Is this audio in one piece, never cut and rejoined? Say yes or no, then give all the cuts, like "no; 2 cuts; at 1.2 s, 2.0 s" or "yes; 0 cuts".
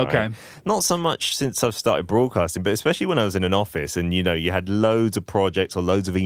yes; 0 cuts